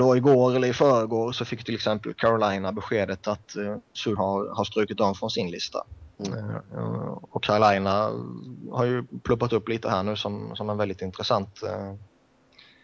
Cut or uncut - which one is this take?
cut